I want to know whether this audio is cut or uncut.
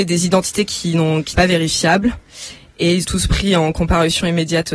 cut